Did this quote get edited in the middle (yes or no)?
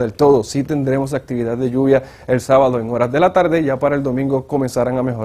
no